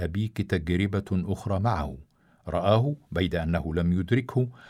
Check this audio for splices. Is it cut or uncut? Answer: uncut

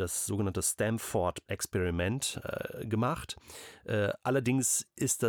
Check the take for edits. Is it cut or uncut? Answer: cut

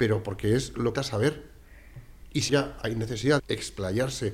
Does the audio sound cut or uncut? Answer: cut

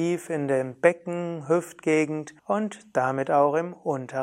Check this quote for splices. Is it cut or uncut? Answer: cut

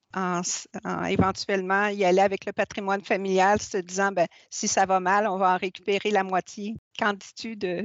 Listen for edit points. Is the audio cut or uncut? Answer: uncut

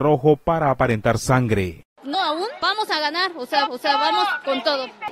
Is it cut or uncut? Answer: cut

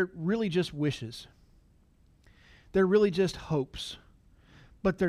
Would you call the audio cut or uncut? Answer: uncut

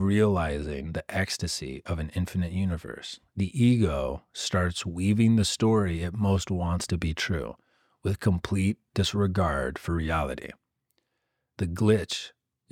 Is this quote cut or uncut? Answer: uncut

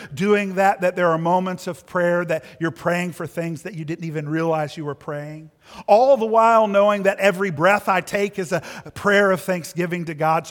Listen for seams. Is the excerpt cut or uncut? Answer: uncut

